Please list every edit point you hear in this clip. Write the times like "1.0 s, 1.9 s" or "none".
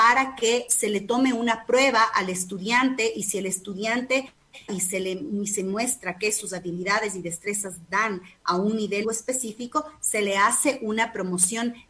4.7 s, 9.0 s